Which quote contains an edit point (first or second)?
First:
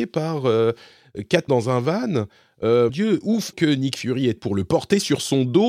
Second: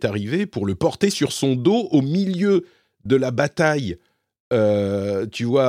first